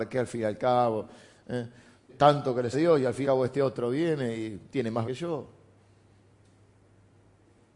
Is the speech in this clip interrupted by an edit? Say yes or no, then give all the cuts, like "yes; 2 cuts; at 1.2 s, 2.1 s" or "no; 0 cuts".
yes; 5 cuts; at 2.1 s, 2.7 s, 3.2 s, 4.7 s, 5.0 s